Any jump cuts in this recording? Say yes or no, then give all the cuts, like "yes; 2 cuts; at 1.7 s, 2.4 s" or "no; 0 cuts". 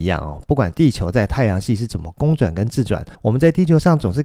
yes; 1 cut; at 3.1 s